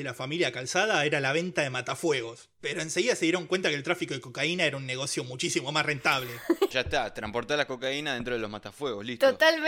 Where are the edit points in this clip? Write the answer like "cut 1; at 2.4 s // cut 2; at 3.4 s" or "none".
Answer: cut 1; at 6.7 s